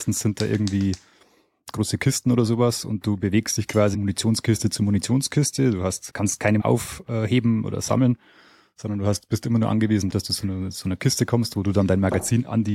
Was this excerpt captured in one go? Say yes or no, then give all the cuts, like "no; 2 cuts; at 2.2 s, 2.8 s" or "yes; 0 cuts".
no; 4 cuts; at 3.9 s, 6.1 s, 6.6 s, 10.1 s